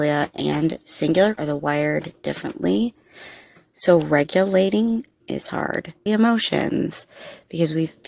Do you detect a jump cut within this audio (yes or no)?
yes